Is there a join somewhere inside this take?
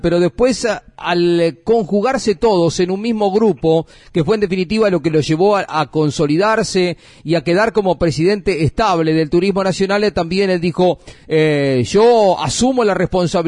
no; 0 cuts

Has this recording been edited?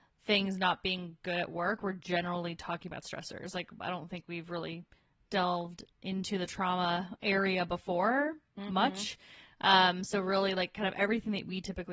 no; 0 cuts

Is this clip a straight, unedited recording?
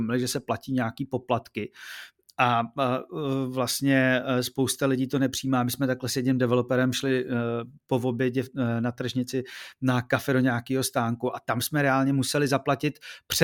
yes; 0 cuts

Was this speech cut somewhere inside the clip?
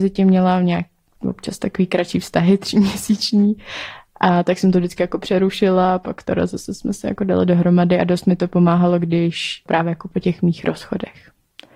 no; 0 cuts

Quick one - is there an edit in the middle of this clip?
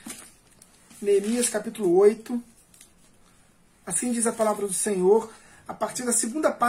no; 0 cuts

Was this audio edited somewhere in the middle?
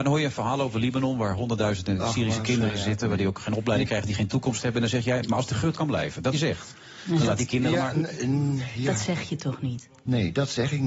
yes; 2 cuts; at 5.8 s, 6.3 s

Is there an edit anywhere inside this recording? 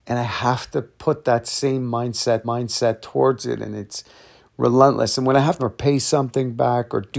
yes; 2 cuts; at 2.4 s, 5.6 s

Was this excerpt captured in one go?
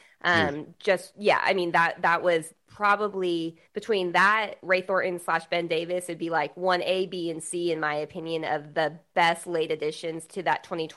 no; 1 cut; at 3.7 s

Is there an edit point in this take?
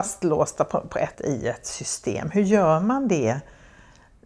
yes; 1 cut; at 1.1 s

